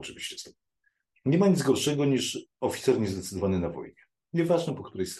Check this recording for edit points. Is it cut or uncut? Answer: uncut